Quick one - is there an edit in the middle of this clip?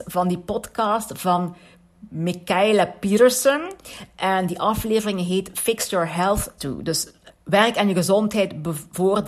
yes; 2 cuts; at 6.6 s, 7.3 s

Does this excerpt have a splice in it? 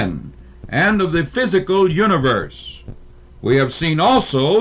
no; 0 cuts

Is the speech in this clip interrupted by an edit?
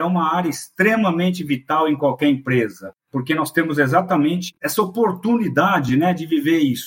no; 0 cuts

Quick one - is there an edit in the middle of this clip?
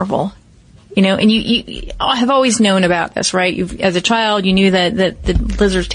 no; 0 cuts

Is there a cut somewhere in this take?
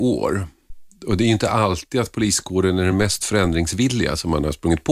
no; 0 cuts

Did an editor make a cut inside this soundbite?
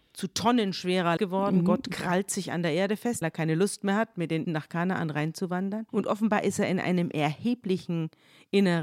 yes; 4 cuts; at 1.2 s, 3.2 s, 4.4 s, 5.9 s

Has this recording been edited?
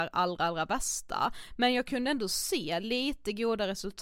no; 0 cuts

